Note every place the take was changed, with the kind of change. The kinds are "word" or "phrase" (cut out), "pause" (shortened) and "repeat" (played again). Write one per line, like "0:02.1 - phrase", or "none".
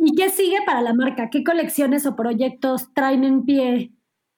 none